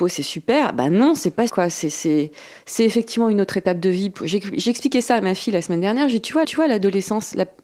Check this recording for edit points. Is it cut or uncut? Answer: cut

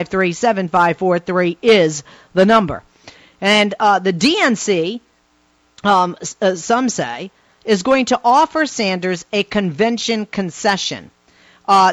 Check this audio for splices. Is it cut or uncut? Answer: uncut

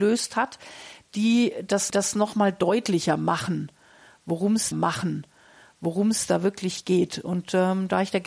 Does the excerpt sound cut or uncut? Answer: cut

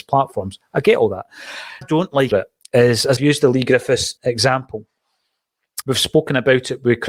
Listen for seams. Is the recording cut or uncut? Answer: cut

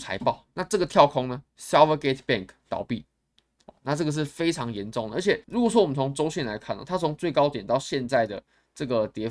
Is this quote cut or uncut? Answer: cut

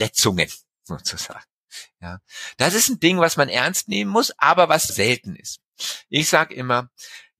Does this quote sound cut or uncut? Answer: cut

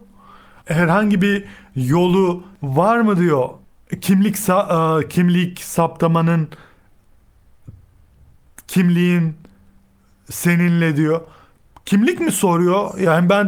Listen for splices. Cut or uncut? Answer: uncut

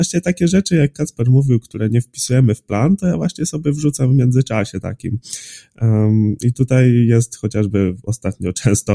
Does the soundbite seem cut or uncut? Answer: uncut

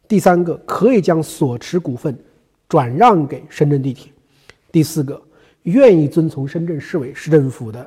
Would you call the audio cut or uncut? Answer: uncut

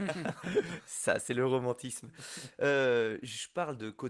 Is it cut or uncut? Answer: uncut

